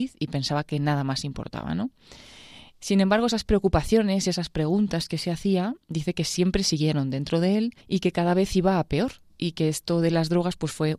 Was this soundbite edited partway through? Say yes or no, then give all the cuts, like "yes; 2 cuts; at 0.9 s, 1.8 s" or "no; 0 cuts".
yes; 1 cut; at 7.8 s